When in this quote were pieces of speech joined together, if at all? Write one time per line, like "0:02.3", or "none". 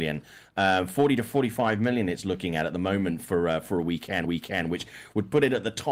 0:04.2